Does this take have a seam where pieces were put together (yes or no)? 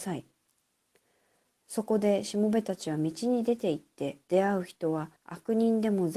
yes